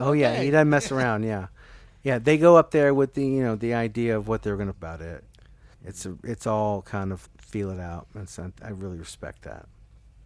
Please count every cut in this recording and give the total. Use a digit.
3